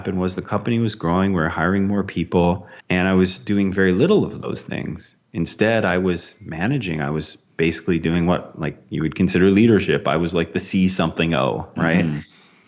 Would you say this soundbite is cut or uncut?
cut